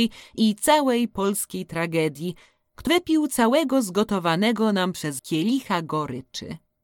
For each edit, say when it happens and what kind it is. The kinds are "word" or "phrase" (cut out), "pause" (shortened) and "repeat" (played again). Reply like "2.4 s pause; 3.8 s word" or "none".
2.9 s word; 5.2 s word